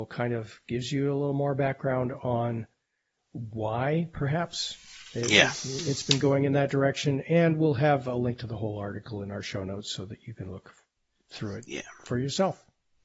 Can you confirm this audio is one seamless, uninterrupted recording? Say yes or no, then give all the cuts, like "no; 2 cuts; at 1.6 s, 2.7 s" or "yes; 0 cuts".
yes; 0 cuts